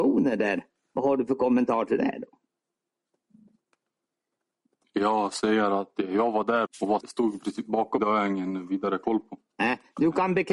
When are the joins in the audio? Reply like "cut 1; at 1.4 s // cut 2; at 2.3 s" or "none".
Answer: cut 1; at 6.7 s // cut 2; at 7.0 s // cut 3; at 8.0 s